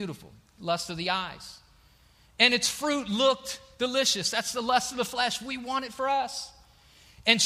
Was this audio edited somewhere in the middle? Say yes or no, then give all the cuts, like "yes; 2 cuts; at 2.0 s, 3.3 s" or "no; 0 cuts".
no; 0 cuts